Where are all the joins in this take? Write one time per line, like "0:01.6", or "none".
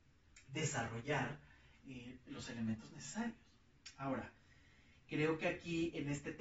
none